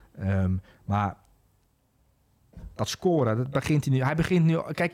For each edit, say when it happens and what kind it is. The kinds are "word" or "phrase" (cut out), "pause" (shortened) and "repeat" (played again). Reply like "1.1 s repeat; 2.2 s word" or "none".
none